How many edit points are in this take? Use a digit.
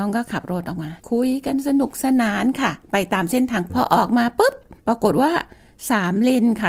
3